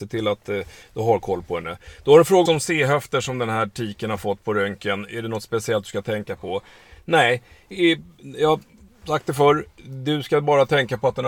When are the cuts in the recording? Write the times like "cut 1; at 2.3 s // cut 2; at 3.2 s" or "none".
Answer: cut 1; at 2.5 s